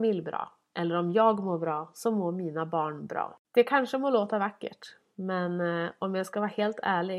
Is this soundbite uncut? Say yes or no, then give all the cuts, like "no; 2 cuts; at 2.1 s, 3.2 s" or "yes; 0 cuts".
no; 1 cut; at 3.4 s